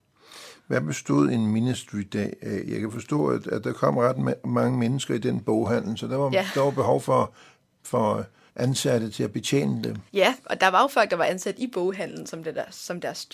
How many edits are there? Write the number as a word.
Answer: two